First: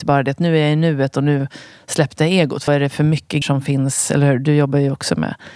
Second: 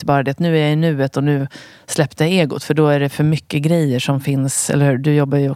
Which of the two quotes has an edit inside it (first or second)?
first